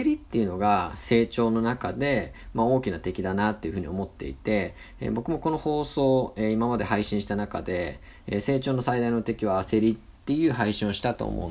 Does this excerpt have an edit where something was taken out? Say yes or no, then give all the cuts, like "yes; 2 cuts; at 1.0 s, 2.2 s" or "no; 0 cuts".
yes; 1 cut; at 10.2 s